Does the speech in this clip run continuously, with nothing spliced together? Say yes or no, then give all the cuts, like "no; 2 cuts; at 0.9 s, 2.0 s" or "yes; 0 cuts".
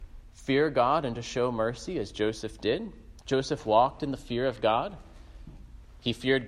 yes; 0 cuts